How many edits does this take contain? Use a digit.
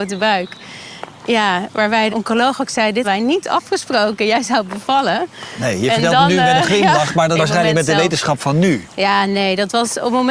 3